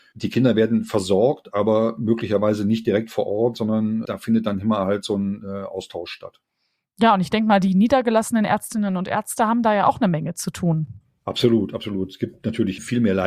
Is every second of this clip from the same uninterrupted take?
yes; 0 cuts

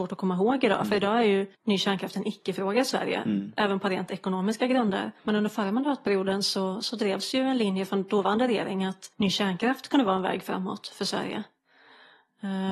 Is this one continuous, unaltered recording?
no; 3 cuts; at 1.5 s, 5.2 s, 9.1 s

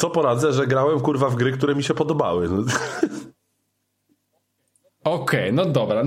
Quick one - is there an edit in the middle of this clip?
no; 0 cuts

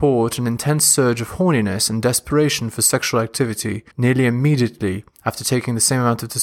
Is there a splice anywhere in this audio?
yes; 1 cut; at 3.9 s

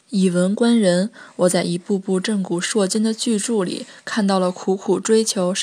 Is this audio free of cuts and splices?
yes; 0 cuts

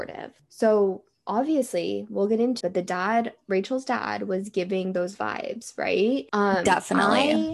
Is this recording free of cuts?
no; 2 cuts; at 2.6 s, 6.3 s

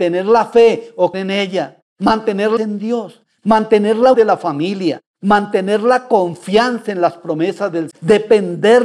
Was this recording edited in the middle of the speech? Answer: yes; 4 cuts; at 1.1 s, 2.6 s, 4.1 s, 7.9 s

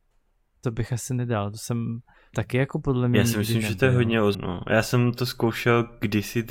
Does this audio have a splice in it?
yes; 2 cuts; at 2.3 s, 4.3 s

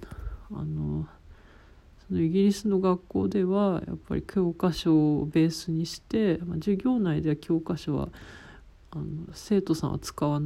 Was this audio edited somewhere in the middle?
no; 0 cuts

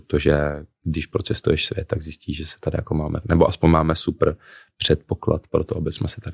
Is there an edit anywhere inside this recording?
yes; 1 cut; at 3.2 s

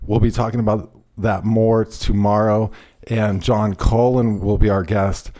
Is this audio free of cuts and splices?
yes; 0 cuts

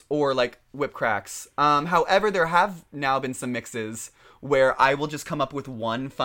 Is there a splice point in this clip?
no; 0 cuts

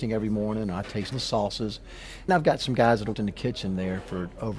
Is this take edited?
yes; 3 cuts; at 1.1 s, 2.3 s, 3.1 s

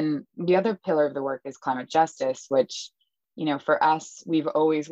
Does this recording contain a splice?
no; 0 cuts

